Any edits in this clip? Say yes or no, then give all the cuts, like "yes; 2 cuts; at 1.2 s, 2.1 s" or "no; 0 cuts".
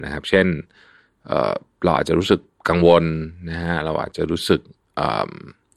no; 0 cuts